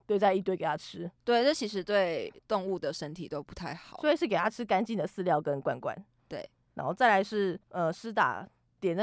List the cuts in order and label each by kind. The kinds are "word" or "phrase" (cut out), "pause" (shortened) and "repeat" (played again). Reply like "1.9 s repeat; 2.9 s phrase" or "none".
2.4 s pause; 7.6 s pause